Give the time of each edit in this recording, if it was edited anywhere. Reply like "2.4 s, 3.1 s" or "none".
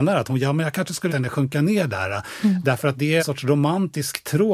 1.1 s, 3.2 s